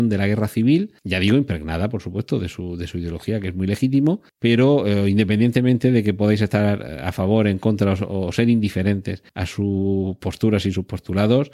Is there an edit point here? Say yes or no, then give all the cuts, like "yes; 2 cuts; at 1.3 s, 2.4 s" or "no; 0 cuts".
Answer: yes; 3 cuts; at 1.0 s, 4.3 s, 9.3 s